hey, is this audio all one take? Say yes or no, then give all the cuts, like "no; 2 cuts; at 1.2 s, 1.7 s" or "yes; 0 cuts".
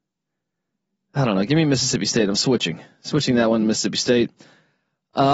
yes; 0 cuts